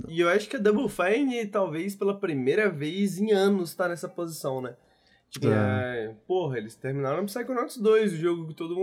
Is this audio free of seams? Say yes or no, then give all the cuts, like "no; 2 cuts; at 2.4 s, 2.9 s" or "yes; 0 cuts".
no; 1 cut; at 5.4 s